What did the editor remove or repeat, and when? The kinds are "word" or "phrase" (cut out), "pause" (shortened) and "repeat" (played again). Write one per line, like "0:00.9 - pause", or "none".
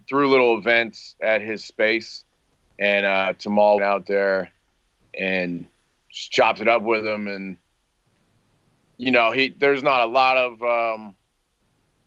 0:03.8 - phrase